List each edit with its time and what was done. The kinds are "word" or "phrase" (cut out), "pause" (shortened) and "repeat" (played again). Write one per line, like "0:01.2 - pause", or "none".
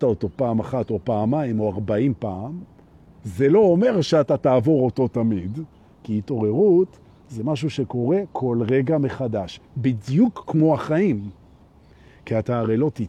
none